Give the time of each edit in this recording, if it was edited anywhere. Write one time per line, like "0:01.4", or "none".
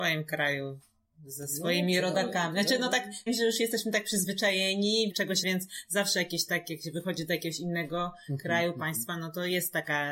0:03.3
0:05.1
0:05.4

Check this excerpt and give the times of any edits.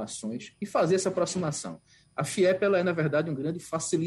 none

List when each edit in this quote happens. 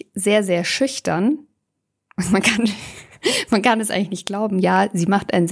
none

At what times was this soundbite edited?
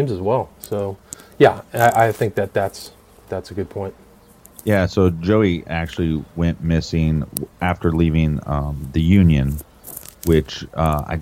none

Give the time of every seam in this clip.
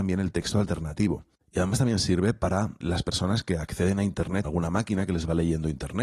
0:02.8
0:04.4

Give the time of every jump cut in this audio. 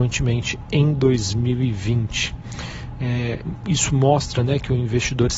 none

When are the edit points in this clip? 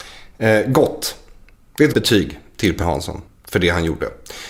0:01.6
0:01.9
0:02.8
0:03.3

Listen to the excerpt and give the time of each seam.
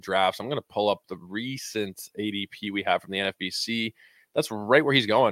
none

